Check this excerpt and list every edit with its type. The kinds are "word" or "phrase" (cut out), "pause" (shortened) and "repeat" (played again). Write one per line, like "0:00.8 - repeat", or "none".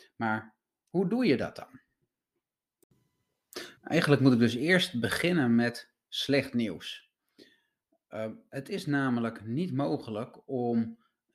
0:03.8 - pause

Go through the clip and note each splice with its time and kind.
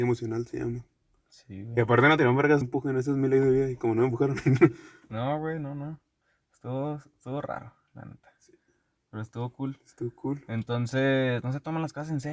0:02.6 - phrase

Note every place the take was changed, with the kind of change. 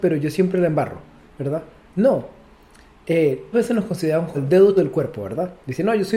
0:03.5 - word
0:04.3 - word
0:04.8 - word

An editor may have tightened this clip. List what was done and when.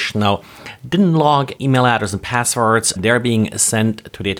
0:01.6 - word
0:03.0 - word

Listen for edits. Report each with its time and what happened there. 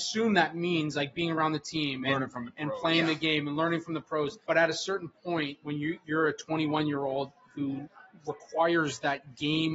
0:04.4 - pause

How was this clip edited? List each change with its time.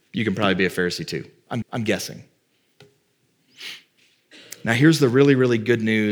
0:01.6 - repeat

